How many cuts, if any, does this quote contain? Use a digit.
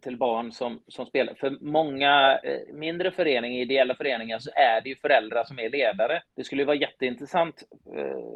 1